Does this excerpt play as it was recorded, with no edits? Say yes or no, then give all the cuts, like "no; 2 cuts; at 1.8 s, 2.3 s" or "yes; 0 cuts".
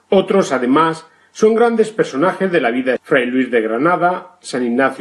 no; 1 cut; at 3.0 s